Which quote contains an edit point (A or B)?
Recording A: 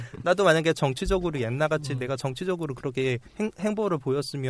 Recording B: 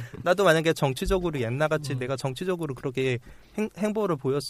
A